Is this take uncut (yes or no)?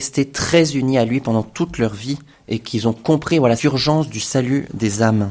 no